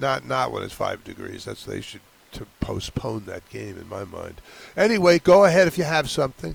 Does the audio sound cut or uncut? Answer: uncut